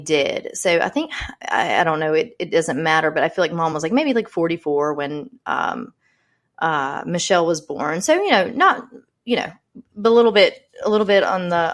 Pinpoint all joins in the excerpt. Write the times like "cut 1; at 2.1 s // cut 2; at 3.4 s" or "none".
none